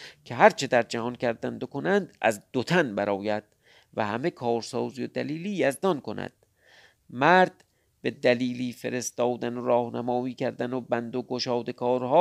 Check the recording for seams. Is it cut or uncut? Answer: uncut